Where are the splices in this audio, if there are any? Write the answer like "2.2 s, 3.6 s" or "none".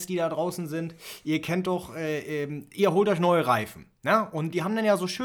4.0 s